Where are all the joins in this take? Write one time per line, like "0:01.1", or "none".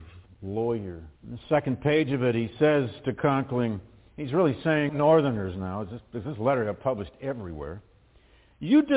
0:01.2
0:04.9